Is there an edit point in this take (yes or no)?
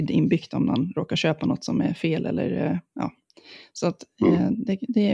no